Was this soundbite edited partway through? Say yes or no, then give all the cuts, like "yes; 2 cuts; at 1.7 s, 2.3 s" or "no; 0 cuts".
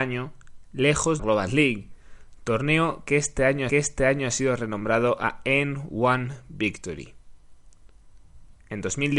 yes; 2 cuts; at 1.2 s, 3.7 s